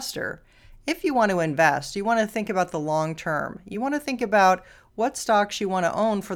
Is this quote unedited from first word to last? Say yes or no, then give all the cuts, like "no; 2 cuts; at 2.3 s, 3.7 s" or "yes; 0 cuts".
yes; 0 cuts